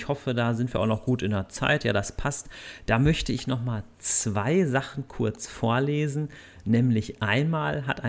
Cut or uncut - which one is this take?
uncut